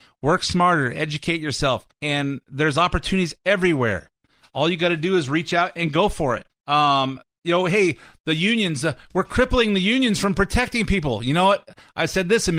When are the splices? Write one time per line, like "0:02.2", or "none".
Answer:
0:01.9
0:06.5